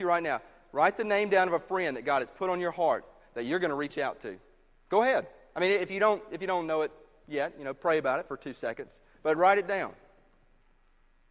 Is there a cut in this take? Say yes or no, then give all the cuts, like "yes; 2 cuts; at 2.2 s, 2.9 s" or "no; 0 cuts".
no; 0 cuts